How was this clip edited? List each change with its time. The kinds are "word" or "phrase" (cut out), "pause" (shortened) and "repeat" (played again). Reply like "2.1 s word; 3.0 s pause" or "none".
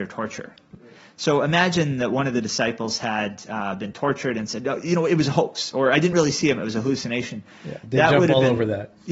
none